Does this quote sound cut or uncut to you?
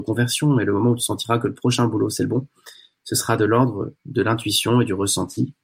uncut